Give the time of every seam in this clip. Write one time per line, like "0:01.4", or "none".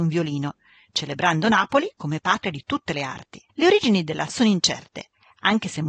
0:03.5
0:04.3